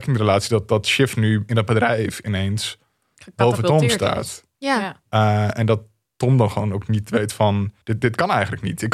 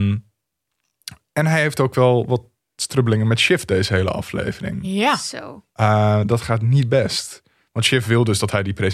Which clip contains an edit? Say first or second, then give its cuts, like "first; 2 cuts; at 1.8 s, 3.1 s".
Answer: first; 1 cut; at 7.8 s